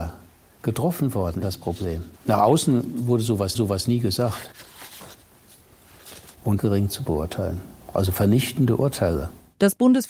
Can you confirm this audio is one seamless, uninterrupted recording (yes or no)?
no